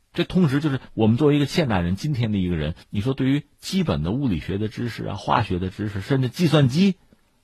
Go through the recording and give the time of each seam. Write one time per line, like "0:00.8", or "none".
0:02.8